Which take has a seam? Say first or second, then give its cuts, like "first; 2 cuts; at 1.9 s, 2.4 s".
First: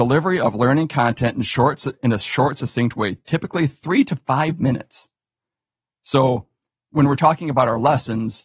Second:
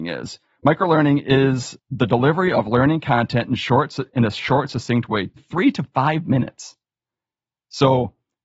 second; 1 cut; at 5.4 s